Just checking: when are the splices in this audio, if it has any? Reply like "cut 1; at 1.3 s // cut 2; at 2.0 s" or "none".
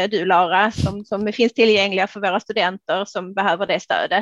none